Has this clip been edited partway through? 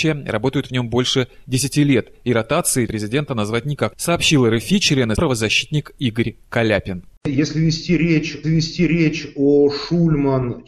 yes; 4 cuts; at 2.9 s, 3.9 s, 5.1 s, 8.4 s

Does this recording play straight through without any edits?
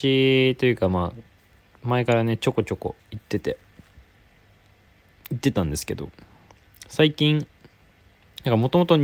yes; 0 cuts

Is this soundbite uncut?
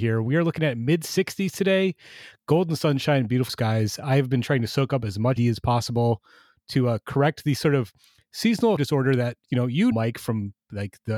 no; 4 cuts; at 3.5 s, 5.4 s, 8.8 s, 9.9 s

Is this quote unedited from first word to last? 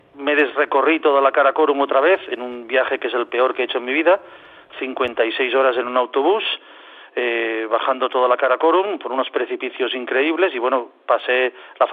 yes; 0 cuts

